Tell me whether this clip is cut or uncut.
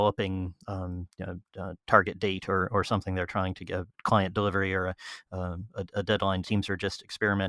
cut